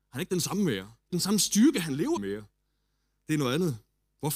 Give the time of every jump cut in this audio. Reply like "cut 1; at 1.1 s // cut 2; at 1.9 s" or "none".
cut 1; at 1.1 s // cut 2; at 2.2 s